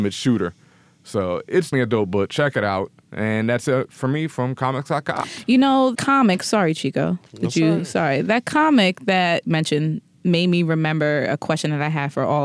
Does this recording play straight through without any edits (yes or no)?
no